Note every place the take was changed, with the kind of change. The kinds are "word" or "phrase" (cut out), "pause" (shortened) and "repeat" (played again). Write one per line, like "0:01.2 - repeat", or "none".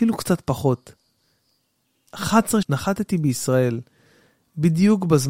0:02.6 - word